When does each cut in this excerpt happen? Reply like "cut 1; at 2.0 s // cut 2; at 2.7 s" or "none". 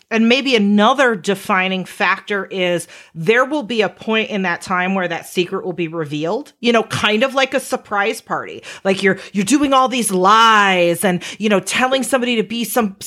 none